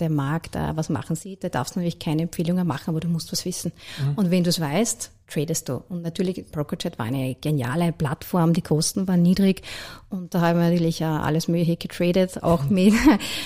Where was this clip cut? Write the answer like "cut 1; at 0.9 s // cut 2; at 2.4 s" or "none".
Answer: none